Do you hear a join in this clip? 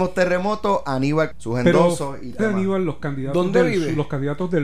yes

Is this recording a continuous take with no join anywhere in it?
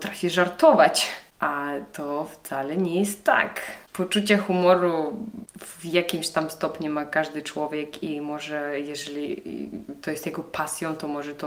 yes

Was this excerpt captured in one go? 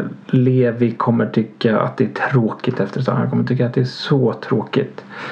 yes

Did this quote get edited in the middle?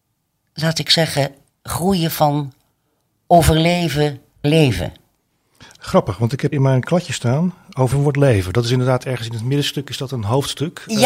yes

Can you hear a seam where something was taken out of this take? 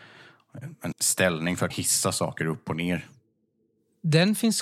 yes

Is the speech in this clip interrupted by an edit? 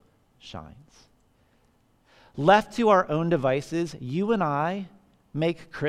no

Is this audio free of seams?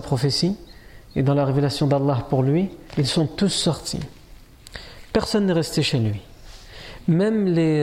no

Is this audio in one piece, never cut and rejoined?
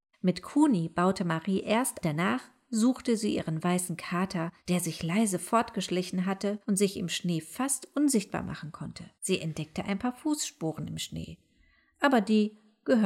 no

